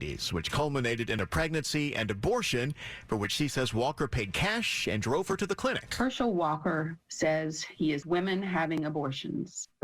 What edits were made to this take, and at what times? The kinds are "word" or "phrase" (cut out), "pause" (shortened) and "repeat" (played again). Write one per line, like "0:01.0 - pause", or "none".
0:08.0 - word